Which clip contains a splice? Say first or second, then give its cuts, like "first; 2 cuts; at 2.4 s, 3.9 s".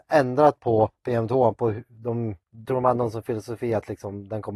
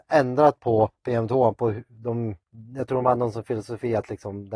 first; 1 cut; at 2.7 s